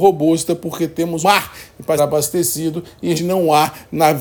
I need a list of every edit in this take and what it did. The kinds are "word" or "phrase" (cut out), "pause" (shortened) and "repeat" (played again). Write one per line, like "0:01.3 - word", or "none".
0:01.2 - word
0:02.0 - word
0:03.2 - word